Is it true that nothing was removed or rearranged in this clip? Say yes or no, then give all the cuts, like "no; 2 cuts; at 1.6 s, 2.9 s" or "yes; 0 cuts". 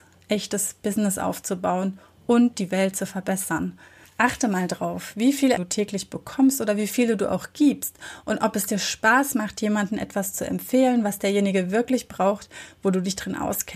no; 1 cut; at 5.6 s